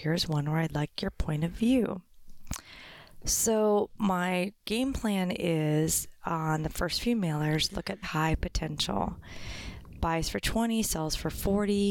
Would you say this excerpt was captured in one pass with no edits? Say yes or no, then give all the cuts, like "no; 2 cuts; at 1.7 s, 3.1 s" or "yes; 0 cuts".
no; 1 cut; at 8.0 s